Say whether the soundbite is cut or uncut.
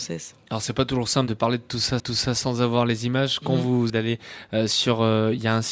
cut